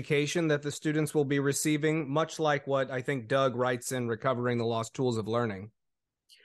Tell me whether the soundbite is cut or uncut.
uncut